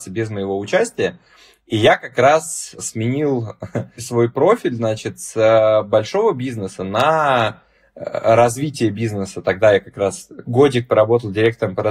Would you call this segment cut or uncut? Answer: uncut